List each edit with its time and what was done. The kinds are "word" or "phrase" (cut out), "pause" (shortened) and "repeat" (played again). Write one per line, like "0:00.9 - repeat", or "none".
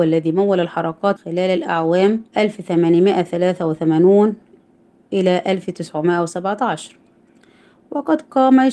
0:01.2 - phrase
0:02.3 - pause